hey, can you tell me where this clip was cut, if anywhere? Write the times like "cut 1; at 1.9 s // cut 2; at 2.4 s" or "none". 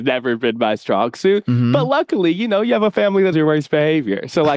cut 1; at 3.3 s